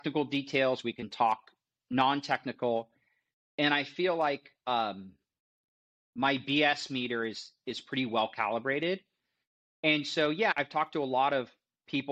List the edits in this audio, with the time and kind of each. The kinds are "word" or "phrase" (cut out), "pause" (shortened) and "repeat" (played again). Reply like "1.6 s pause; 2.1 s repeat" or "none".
none